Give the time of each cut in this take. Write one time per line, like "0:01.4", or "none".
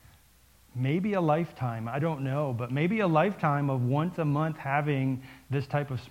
none

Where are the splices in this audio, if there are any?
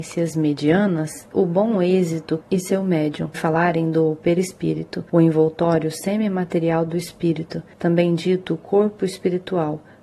0:01.3
0:02.4
0:03.3

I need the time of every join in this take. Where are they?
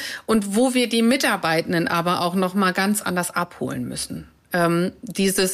none

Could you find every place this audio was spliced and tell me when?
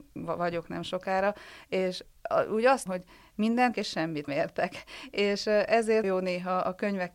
0:02.9
0:03.7
0:04.3
0:06.0

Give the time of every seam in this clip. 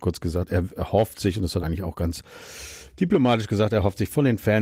0:01.6

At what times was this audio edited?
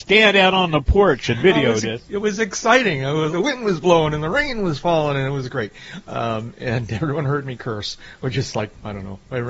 0:03.3

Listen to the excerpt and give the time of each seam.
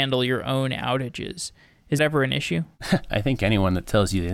0:02.0

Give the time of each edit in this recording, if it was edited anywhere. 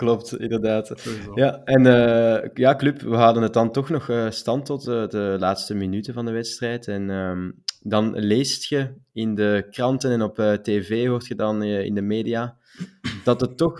none

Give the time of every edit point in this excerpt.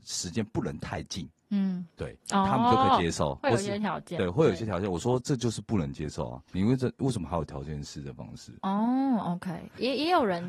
0:02.2
0:06.5
0:08.6

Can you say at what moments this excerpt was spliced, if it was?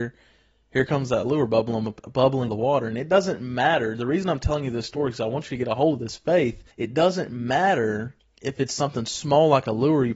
0:02.5
0:06.7
0:08.2

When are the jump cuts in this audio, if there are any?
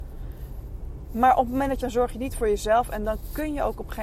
0:01.8

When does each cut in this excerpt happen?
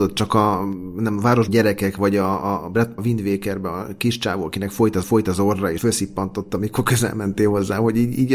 0:01.5
0:03.0
0:05.0
0:05.8

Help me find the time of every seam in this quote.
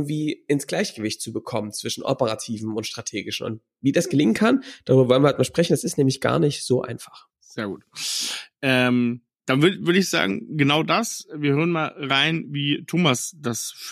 0:07.3

